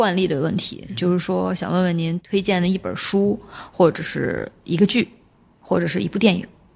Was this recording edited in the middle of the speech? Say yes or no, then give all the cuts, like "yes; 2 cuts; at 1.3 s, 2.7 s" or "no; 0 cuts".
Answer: no; 0 cuts